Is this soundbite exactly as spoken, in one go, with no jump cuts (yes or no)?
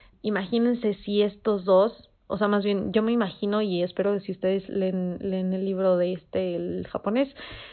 no